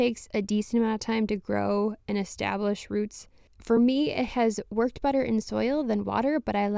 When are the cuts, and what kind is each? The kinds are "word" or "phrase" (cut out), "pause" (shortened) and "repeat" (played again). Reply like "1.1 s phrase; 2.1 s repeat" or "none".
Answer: none

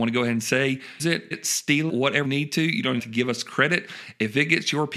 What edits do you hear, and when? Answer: 1.0 s word; 1.3 s word; 1.9 s word; 2.2 s word; 3.0 s word

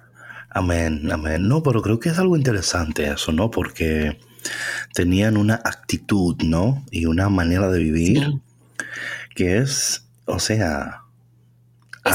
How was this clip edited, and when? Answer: none

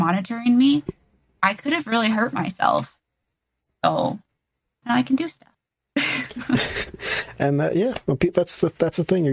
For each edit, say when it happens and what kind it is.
4.8 s word

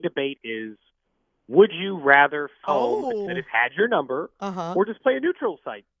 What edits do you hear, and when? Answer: 2.6 s phrase; 3.3 s word

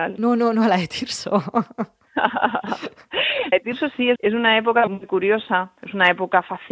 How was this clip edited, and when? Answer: 3.5 s word; 4.2 s word; 4.9 s word

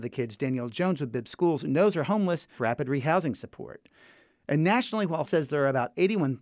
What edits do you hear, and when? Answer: 2.6 s word; 5.2 s word

